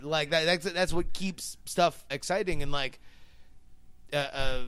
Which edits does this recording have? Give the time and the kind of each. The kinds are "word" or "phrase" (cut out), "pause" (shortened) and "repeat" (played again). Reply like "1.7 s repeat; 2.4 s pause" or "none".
2.1 s word